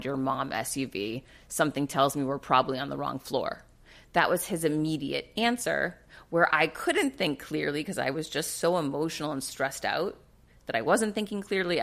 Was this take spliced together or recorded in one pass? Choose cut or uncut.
uncut